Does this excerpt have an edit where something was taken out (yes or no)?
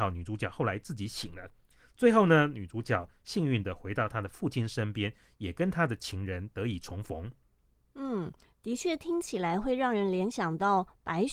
no